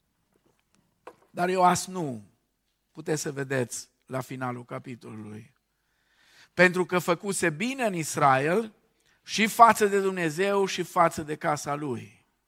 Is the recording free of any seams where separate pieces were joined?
yes; 0 cuts

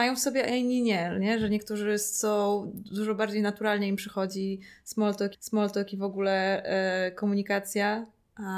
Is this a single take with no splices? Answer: no; 1 cut; at 5.3 s

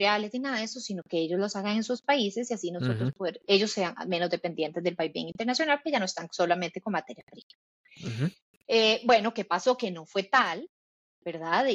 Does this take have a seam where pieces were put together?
no; 0 cuts

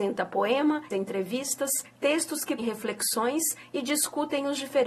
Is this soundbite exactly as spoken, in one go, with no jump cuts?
no; 2 cuts; at 0.9 s, 2.6 s

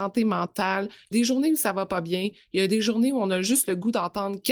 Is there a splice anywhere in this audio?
yes; 1 cut; at 1.1 s

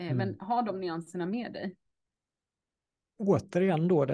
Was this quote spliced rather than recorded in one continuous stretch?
no; 0 cuts

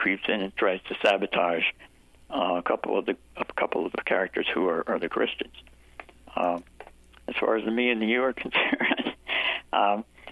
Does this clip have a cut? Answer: no; 0 cuts

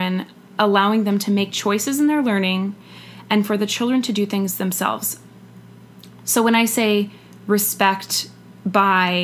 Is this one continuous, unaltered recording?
yes; 0 cuts

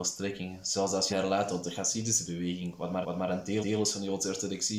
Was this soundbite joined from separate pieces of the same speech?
yes; 3 cuts; at 1.1 s, 3.0 s, 3.6 s

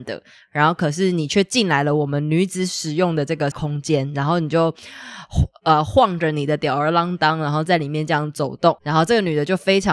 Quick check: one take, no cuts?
no; 2 cuts; at 3.5 s, 8.8 s

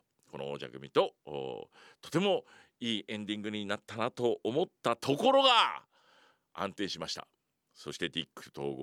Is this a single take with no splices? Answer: yes; 0 cuts

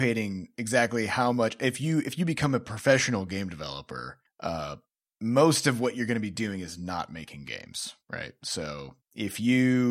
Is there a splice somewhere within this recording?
no; 0 cuts

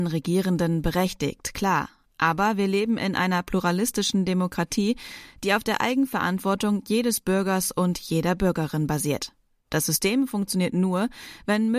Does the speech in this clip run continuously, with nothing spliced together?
yes; 0 cuts

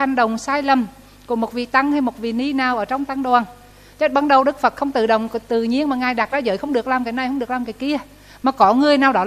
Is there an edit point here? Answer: no; 0 cuts

